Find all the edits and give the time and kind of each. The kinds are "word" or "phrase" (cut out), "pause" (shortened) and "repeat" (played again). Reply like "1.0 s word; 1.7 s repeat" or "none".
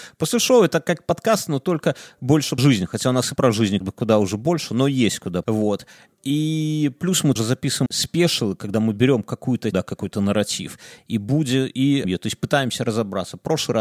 2.6 s word; 3.4 s word; 3.8 s word; 5.4 s word; 7.4 s word; 7.9 s word; 9.7 s word; 12.0 s word